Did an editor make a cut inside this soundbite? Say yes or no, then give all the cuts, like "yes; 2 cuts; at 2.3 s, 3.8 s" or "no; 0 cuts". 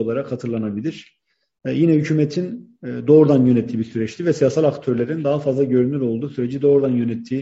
no; 0 cuts